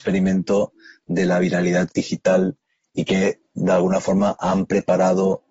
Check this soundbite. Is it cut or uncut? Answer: uncut